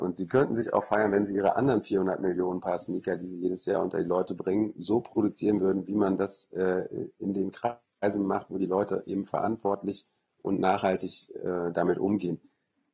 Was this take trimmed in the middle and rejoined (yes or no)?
no